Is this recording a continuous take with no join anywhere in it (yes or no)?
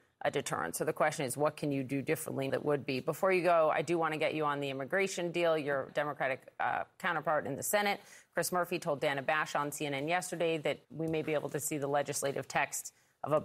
no